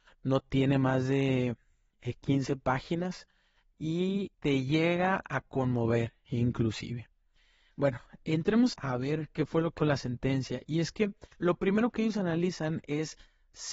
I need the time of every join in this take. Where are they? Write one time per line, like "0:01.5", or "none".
0:04.3
0:08.7
0:09.8
0:11.3